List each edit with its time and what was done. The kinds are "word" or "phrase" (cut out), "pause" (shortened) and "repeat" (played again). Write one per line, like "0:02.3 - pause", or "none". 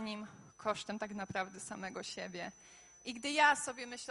none